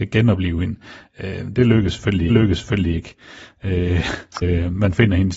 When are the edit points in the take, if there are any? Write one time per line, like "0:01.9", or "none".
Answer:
0:02.3
0:04.4

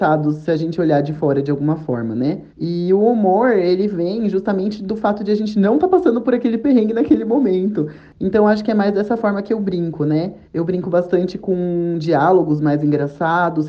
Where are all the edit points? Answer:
0:02.5
0:10.4

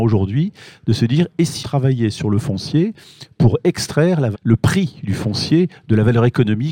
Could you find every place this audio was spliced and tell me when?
0:01.6
0:04.3

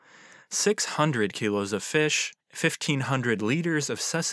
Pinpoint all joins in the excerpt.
0:02.4

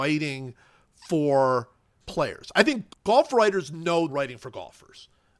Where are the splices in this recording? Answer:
0:02.0
0:02.9
0:04.1

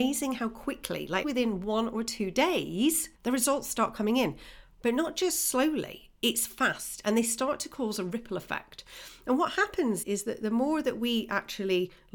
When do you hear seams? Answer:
0:01.2
0:03.2
0:10.0

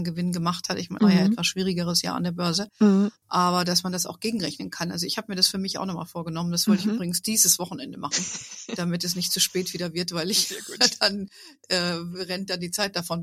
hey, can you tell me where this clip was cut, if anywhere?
0:01.0

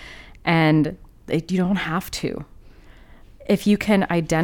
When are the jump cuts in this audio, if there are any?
none

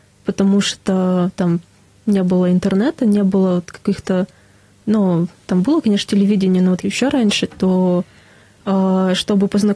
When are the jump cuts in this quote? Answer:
0:06.8

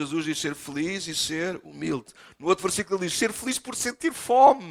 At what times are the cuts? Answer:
none

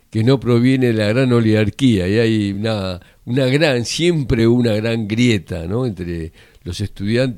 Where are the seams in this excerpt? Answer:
none

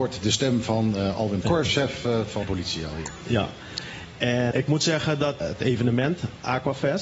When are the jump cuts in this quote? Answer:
0:01.4
0:02.4
0:04.5
0:05.4

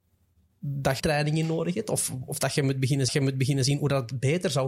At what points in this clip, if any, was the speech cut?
0:01.0
0:02.3
0:03.1

